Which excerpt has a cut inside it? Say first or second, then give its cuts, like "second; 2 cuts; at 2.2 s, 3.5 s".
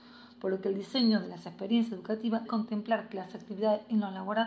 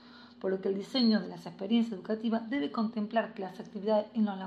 first; 1 cut; at 2.5 s